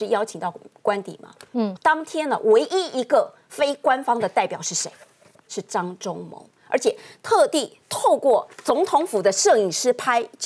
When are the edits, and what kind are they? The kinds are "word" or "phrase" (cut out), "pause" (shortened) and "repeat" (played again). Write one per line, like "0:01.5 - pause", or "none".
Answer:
0:01.8 - word